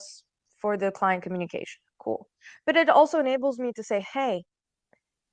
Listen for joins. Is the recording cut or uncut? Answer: uncut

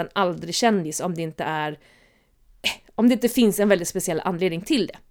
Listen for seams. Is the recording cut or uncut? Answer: uncut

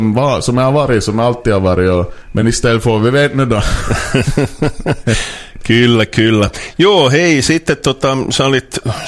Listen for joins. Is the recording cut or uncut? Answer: uncut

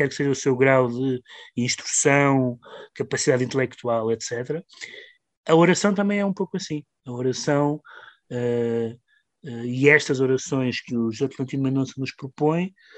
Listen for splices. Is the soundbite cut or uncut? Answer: uncut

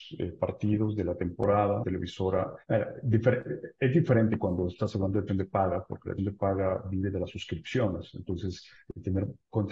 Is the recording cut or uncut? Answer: cut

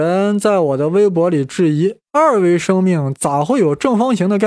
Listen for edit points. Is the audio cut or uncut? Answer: cut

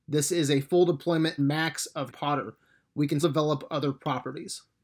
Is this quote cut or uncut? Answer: cut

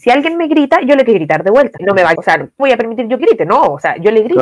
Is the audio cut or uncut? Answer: cut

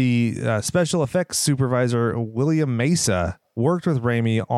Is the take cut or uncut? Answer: uncut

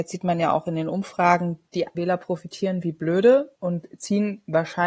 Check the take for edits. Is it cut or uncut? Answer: cut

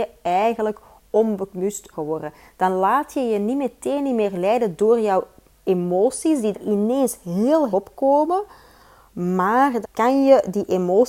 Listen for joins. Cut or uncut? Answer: cut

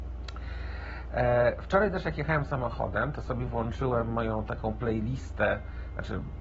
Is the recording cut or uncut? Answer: uncut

